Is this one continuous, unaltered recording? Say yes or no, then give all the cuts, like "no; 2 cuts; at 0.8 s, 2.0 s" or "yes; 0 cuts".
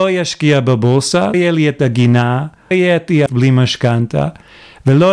no; 3 cuts; at 1.3 s, 2.7 s, 3.3 s